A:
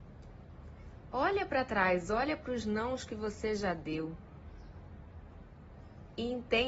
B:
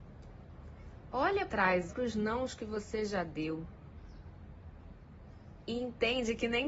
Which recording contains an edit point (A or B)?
B